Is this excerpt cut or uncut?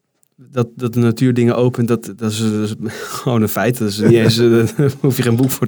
uncut